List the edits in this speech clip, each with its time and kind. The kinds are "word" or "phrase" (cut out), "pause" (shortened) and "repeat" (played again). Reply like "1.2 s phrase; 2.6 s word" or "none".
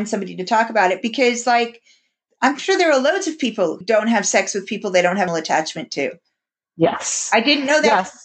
3.8 s word; 5.3 s word